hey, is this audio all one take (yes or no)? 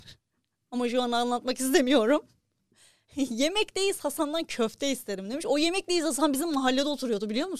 yes